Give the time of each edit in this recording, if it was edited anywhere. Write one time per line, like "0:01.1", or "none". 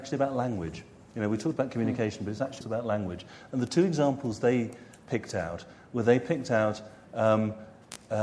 0:02.6

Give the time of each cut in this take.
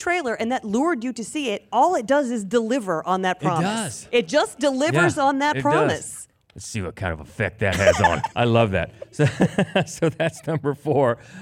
0:08.3

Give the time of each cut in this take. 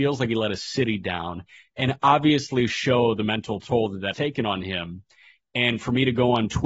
0:04.1

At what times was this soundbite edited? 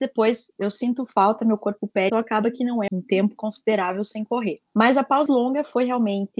0:02.1
0:02.9
0:03.4
0:05.3

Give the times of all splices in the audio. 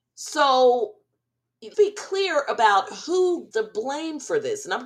0:01.7
0:03.5

